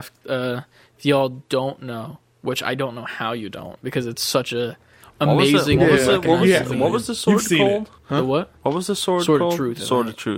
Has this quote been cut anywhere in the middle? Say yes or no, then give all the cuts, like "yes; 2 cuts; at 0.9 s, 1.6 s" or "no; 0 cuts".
yes; 2 cuts; at 5.0 s, 8.0 s